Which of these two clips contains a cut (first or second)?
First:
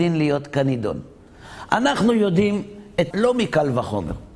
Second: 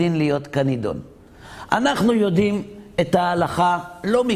first